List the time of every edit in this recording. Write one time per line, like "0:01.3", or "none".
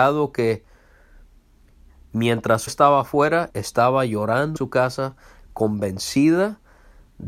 0:02.7
0:03.5
0:04.6